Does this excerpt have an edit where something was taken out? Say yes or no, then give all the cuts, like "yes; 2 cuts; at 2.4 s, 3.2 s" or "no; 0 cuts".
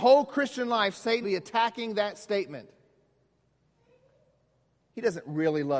yes; 1 cut; at 1.2 s